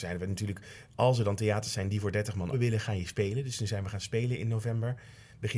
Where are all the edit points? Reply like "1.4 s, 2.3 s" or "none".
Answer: 2.5 s

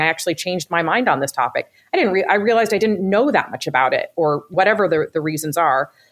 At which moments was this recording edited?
4.5 s

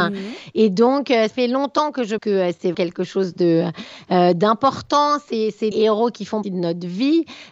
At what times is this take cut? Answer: 1.3 s, 2.2 s, 2.7 s, 5.7 s, 6.4 s

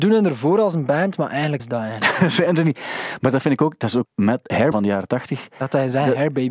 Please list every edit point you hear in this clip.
1.6 s, 4.0 s, 4.7 s

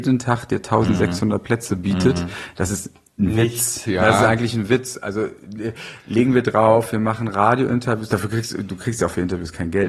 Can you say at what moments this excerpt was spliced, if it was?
none

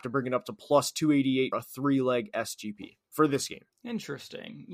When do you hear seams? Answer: 1.5 s, 3.7 s

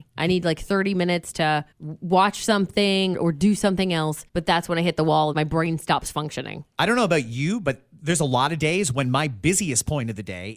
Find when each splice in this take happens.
1.7 s, 3.1 s, 4.3 s, 5.3 s

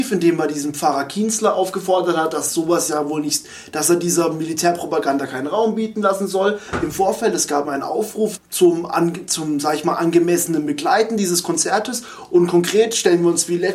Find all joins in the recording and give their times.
7.6 s, 8.4 s

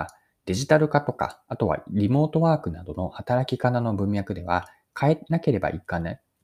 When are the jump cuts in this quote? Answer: none

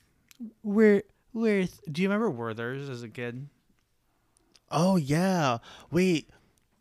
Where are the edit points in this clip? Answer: none

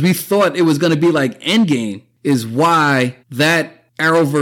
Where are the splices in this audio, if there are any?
3.2 s

